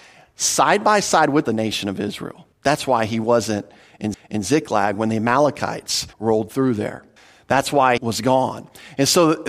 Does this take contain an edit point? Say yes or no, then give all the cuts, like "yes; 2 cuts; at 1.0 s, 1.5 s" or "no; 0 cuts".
yes; 6 cuts; at 1.5 s, 2.5 s, 4.1 s, 6.1 s, 7.2 s, 8.0 s